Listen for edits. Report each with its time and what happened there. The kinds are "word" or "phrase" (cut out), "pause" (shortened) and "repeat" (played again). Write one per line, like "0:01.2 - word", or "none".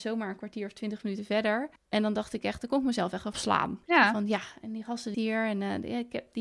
0:01.8 - pause
0:03.3 - phrase
0:03.8 - pause
0:05.1 - word